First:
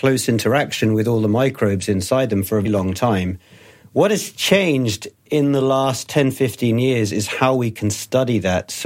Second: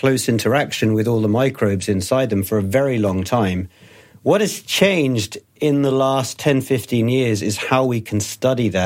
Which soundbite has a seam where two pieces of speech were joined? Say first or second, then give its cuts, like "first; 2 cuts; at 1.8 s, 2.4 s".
first; 1 cut; at 2.6 s